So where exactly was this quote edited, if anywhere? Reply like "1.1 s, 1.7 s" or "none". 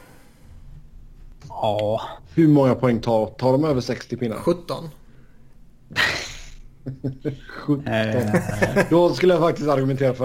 2.2 s

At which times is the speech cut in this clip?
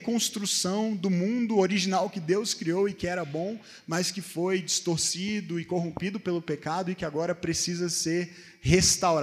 none

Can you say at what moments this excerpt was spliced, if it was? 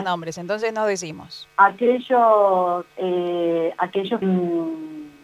2.9 s, 4.2 s

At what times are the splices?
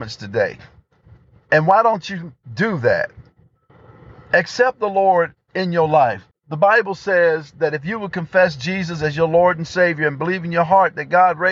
2.4 s, 3.7 s, 5.4 s, 6.3 s

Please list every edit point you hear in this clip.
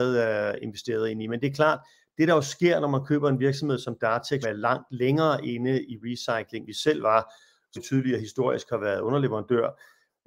4.4 s, 6.7 s, 7.8 s

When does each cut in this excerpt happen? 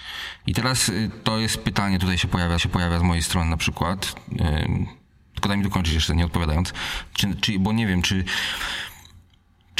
2.6 s

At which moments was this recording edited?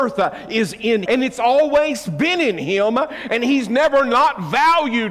1.1 s

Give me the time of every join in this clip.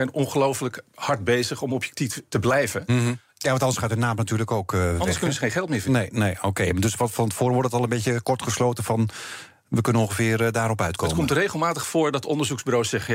2.3 s

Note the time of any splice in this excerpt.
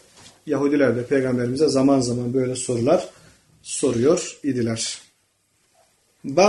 none

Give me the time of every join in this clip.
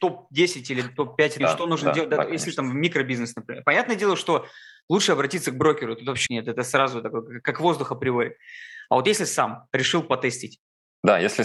1.4 s, 6.3 s

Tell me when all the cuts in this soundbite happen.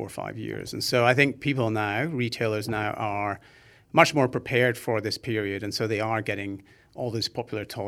none

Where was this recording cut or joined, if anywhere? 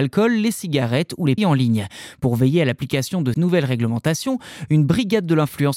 1.4 s, 3.3 s

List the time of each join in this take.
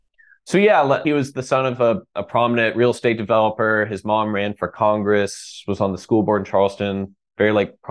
1.0 s

